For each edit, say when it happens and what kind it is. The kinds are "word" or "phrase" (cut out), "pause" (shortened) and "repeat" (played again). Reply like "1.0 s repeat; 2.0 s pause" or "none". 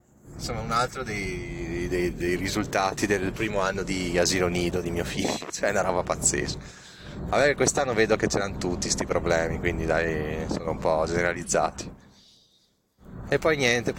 none

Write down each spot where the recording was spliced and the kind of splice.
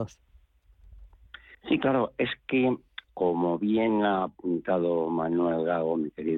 3.0 s word

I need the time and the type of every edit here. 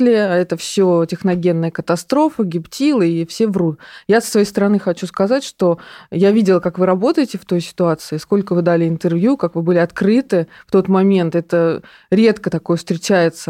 none

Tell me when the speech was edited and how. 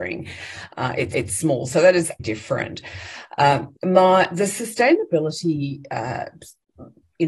1.1 s repeat; 2.2 s word; 3.7 s pause

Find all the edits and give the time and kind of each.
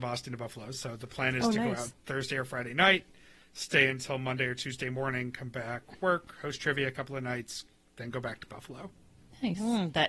none

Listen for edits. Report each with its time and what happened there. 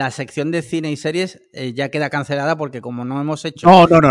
none

